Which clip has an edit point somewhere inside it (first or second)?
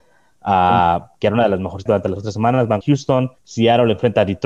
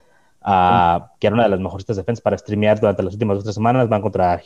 first